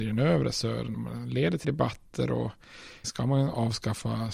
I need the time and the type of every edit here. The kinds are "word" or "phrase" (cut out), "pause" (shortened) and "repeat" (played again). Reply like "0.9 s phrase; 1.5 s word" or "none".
0.9 s word; 1.6 s word; 3.0 s word